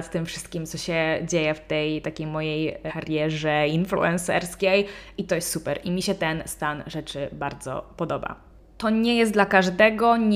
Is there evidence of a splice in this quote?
yes; 1 cut; at 2.9 s

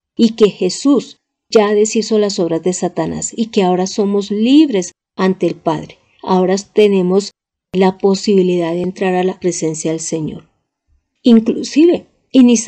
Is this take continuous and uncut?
yes; 0 cuts

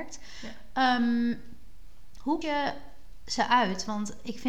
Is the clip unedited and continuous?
no; 1 cut; at 2.4 s

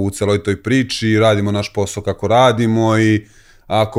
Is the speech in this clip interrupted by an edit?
no; 0 cuts

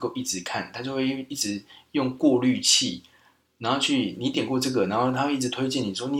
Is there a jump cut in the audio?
no; 0 cuts

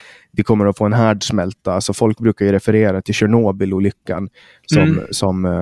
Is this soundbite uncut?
yes; 0 cuts

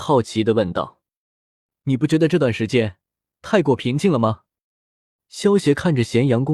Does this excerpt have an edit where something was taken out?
no; 0 cuts

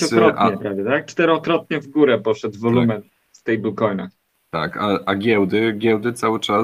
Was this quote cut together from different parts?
no; 0 cuts

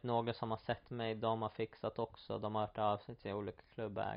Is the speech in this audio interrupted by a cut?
no; 0 cuts

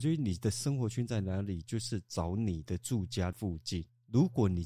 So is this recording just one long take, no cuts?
yes; 0 cuts

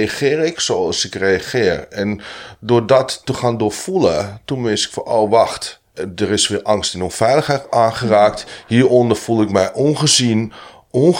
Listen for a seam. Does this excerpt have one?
yes; 1 cut; at 5.9 s

